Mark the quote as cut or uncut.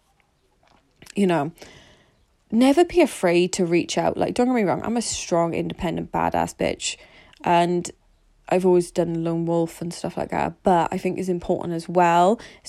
uncut